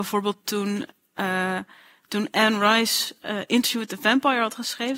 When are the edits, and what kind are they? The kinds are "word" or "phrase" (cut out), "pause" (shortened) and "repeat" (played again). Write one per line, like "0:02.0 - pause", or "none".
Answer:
none